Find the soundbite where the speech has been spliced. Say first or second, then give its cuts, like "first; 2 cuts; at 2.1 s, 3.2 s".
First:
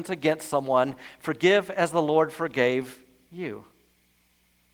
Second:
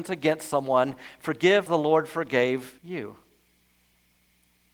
second; 2 cuts; at 1.7 s, 2.8 s